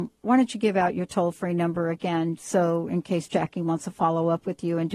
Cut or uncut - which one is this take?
uncut